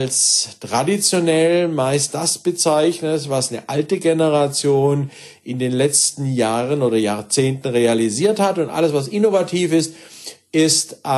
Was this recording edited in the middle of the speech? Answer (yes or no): no